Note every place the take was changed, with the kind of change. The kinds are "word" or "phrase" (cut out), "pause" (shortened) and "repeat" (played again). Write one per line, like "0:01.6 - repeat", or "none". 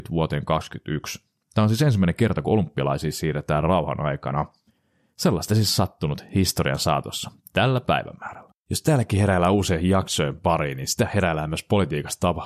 0:08.6 - pause